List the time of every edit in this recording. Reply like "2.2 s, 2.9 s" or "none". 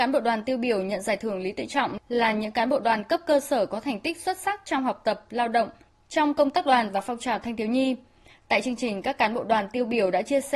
none